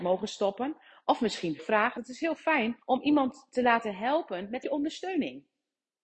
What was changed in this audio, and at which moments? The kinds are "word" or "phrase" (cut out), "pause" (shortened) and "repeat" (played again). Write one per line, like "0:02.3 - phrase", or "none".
0:01.6 - word
0:02.0 - word
0:02.8 - pause
0:04.6 - word